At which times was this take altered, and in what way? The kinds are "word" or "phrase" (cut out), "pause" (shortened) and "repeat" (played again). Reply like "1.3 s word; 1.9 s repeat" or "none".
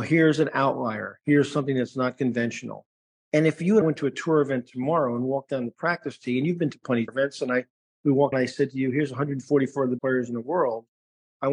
3.8 s word; 7.1 s word; 8.3 s word; 10.0 s word